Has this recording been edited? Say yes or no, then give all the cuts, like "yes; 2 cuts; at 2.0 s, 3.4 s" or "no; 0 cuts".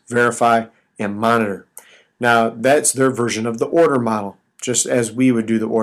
no; 0 cuts